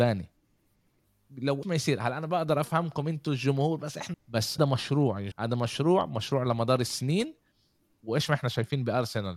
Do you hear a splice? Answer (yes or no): yes